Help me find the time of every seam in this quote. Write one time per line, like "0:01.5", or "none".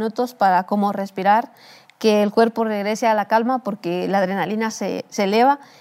none